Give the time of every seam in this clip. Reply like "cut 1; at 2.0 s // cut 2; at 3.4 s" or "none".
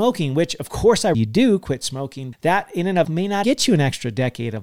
cut 1; at 1.1 s // cut 2; at 2.3 s // cut 3; at 3.0 s // cut 4; at 3.4 s